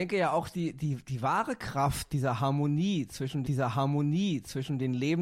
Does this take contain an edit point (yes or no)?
yes